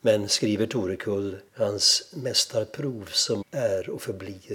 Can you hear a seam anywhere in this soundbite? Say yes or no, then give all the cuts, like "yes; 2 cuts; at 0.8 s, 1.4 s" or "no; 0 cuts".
yes; 2 cuts; at 1.5 s, 3.4 s